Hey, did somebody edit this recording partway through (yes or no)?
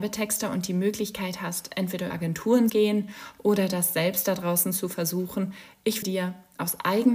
yes